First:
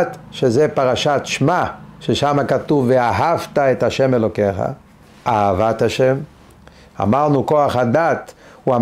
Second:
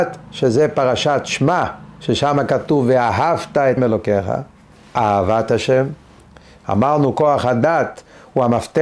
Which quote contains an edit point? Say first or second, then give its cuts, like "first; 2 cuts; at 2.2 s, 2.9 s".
second; 1 cut; at 3.8 s